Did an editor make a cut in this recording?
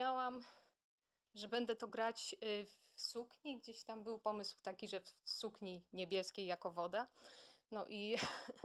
no; 0 cuts

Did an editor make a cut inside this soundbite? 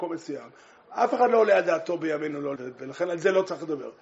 yes; 1 cut; at 2.6 s

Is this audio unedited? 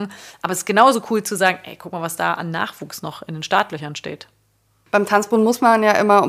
yes; 0 cuts

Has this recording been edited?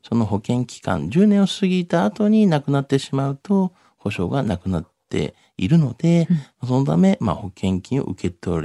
no; 0 cuts

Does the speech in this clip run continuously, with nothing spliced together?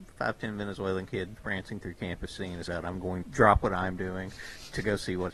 no; 3 cuts; at 1.4 s, 2.7 s, 3.2 s

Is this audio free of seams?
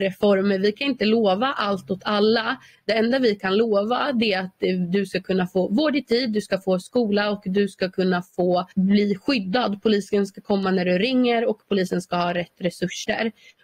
no; 1 cut; at 8.7 s

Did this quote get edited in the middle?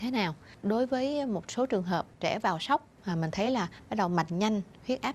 no; 0 cuts

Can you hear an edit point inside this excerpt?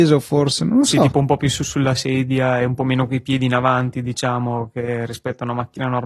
no; 0 cuts

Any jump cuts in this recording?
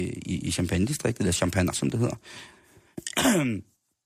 yes; 1 cut; at 1.7 s

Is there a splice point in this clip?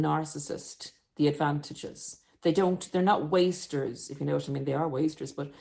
no; 0 cuts

